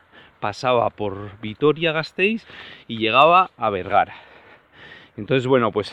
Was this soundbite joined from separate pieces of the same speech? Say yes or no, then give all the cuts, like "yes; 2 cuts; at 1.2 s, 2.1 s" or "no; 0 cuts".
no; 0 cuts